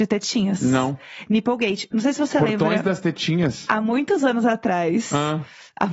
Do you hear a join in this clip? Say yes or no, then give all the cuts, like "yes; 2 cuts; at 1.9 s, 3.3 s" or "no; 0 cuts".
no; 0 cuts